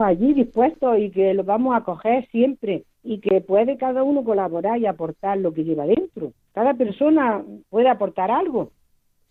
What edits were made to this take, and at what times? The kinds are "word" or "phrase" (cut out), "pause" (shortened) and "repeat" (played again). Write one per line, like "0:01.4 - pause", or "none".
0:02.9 - pause
0:07.6 - pause